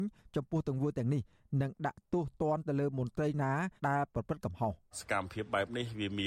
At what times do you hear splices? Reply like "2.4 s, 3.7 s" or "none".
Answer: 3.8 s, 4.9 s